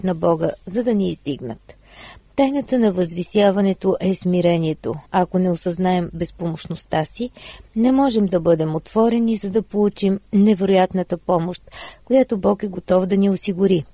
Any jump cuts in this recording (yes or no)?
yes